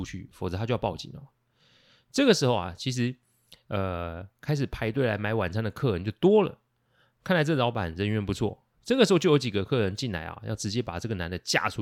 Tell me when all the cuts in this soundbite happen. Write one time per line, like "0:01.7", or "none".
none